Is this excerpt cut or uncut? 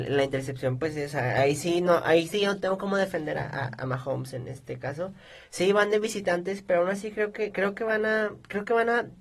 uncut